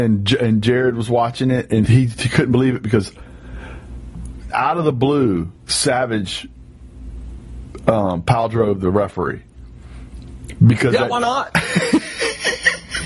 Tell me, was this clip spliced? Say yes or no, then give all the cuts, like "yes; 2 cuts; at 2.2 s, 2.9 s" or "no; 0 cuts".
yes; 3 cuts; at 1.9 s, 4.5 s, 5.5 s